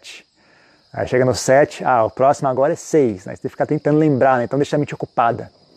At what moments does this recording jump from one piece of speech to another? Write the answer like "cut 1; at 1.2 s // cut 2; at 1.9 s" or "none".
none